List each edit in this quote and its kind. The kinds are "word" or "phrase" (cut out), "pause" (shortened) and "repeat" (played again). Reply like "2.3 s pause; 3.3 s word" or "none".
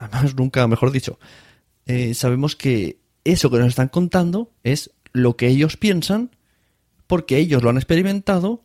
4.6 s pause